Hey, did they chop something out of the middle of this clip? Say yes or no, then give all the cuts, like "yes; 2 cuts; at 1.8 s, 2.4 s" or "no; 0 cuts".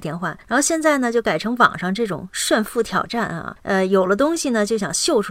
no; 0 cuts